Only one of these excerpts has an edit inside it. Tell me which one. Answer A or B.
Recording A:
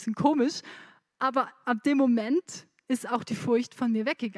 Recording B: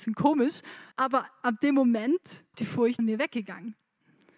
B